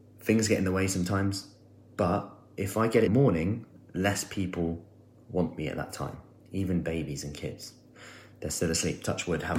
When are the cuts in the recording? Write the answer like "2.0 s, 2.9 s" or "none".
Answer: 3.1 s